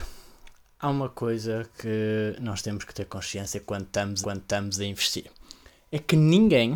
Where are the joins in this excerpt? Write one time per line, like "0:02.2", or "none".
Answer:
0:04.2